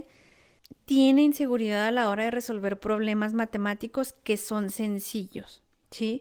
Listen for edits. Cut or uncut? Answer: uncut